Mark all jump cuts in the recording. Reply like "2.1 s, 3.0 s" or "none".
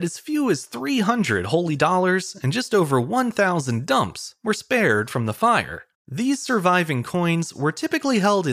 5.9 s